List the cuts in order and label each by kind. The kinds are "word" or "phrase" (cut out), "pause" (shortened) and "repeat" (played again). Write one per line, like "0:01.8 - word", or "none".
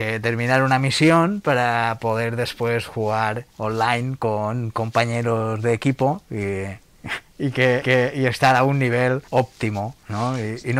0:03.5 - pause
0:07.8 - repeat
0:09.3 - pause